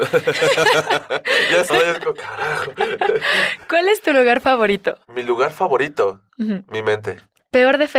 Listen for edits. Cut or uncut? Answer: cut